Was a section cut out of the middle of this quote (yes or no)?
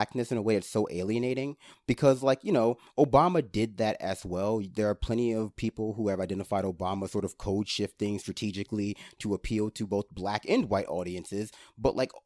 no